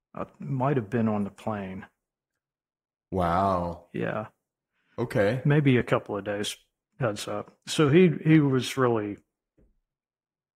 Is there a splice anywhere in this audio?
no; 0 cuts

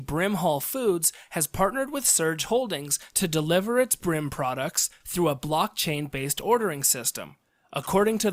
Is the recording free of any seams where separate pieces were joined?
yes; 0 cuts

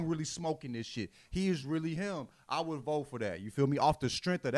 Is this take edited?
no; 0 cuts

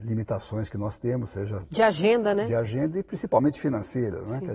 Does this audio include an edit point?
no; 0 cuts

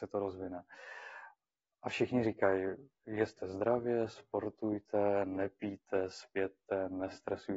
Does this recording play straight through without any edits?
yes; 0 cuts

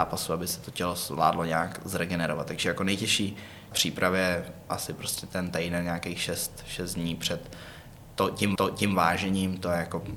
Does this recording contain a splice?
yes; 2 cuts; at 3.7 s, 8.6 s

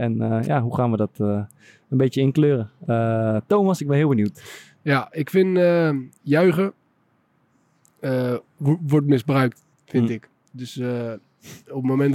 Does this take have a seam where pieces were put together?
yes; 1 cut; at 9.7 s

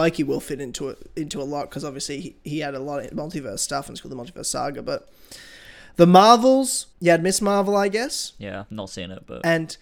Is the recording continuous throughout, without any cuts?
no; 1 cut; at 6.9 s

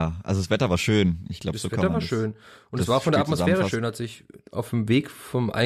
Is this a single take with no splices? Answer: yes; 0 cuts

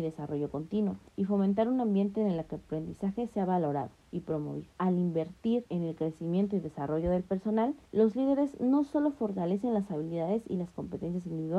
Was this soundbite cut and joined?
yes; 5 cuts; at 1.1 s, 4.0 s, 4.7 s, 5.7 s, 7.9 s

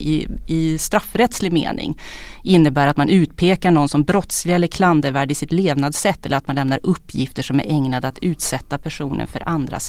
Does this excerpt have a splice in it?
no; 0 cuts

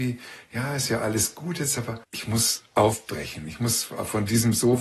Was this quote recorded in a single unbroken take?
no; 1 cut; at 2.0 s

